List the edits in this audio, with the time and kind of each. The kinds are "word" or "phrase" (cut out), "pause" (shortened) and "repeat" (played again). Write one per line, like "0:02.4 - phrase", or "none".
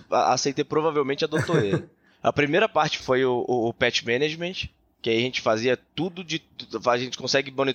none